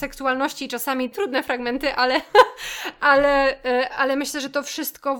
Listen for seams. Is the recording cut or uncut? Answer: cut